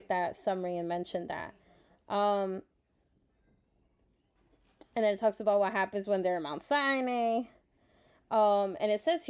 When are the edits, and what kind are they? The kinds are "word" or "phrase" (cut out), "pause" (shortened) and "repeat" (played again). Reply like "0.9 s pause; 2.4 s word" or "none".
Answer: none